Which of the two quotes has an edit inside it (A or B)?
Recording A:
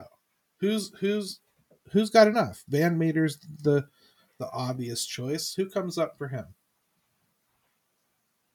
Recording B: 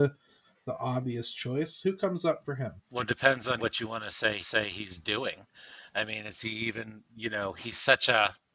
B